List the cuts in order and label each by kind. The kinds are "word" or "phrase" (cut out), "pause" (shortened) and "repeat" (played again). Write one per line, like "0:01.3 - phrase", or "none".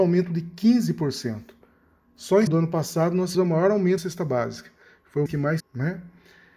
0:02.5 - word
0:03.3 - word
0:04.0 - word
0:05.3 - word
0:05.6 - word